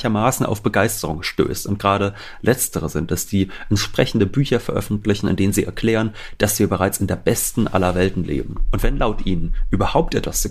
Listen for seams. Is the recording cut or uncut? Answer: uncut